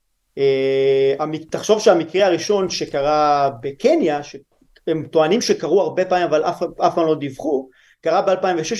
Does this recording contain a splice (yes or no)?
no